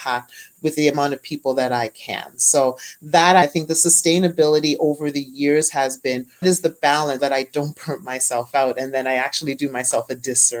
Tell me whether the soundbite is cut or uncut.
cut